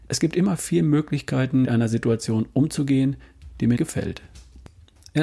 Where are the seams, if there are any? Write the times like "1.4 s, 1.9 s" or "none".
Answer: 1.6 s, 3.8 s